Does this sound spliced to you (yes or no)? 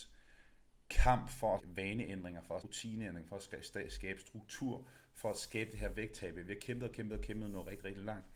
yes